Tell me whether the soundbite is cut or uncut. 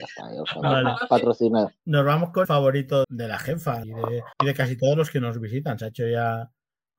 cut